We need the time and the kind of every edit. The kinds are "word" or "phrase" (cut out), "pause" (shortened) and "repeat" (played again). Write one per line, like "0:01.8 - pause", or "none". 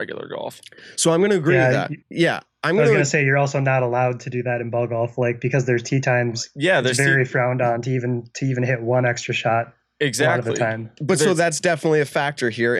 0:02.0 - pause